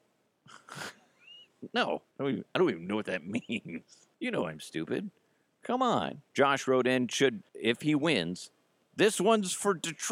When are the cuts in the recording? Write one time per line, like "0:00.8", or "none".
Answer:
0:02.1
0:04.1
0:06.3
0:07.4